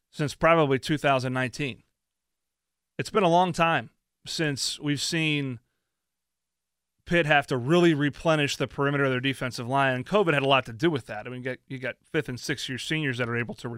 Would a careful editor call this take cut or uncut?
uncut